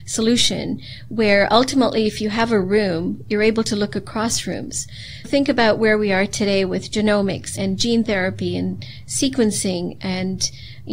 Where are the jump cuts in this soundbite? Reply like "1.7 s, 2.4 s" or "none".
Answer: 5.2 s, 7.6 s

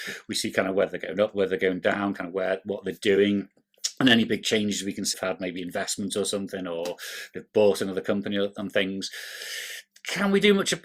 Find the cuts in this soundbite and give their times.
5.1 s

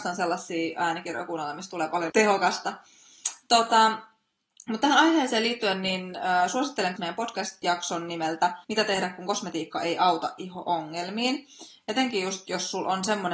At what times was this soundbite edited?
2.1 s, 7.0 s, 8.6 s

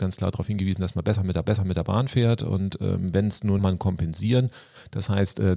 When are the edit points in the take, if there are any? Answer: 1.4 s, 3.6 s

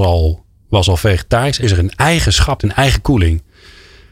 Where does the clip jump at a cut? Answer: 1.6 s, 2.6 s

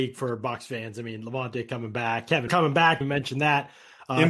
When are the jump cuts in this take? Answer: 2.5 s, 3.0 s

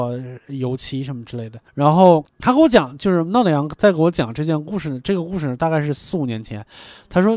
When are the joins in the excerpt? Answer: 1.7 s, 2.3 s

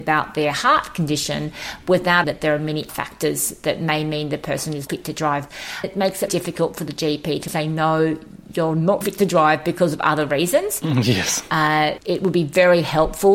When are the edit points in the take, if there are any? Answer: 2.2 s, 2.9 s, 4.9 s, 5.8 s, 6.3 s, 7.5 s, 9.0 s, 12.0 s

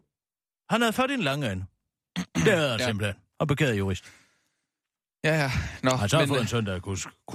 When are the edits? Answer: none

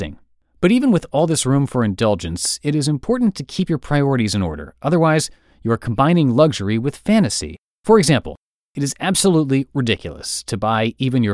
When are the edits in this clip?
none

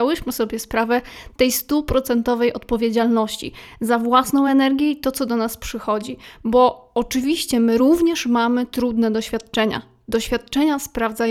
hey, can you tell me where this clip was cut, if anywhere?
none

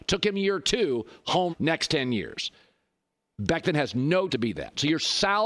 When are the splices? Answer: 1.5 s, 4.3 s

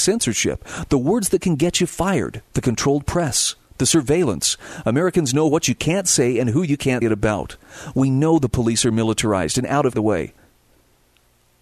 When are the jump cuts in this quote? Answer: 2.5 s, 7.0 s, 9.9 s

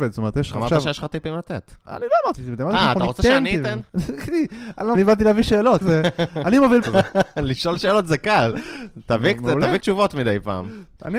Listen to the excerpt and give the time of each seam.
2.3 s, 3.9 s, 4.9 s, 5.8 s, 6.8 s, 9.8 s

